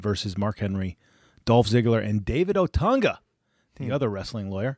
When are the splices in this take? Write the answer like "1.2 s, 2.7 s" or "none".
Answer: none